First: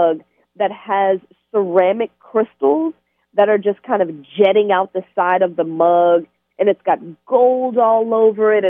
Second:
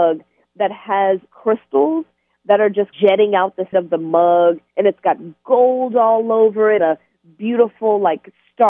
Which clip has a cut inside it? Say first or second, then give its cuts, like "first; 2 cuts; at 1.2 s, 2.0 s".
second; 5 cuts; at 1.3 s, 2.9 s, 3.7 s, 4.7 s, 6.8 s